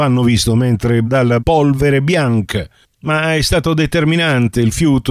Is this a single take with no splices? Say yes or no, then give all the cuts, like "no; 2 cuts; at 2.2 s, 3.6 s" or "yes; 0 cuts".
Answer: no; 2 cuts; at 1.0 s, 1.4 s